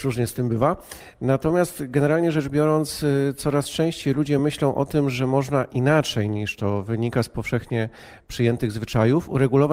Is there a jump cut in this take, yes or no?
no